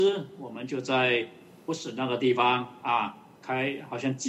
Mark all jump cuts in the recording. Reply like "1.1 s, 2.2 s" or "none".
none